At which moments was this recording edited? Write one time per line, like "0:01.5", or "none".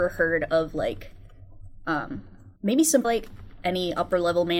0:02.6
0:03.0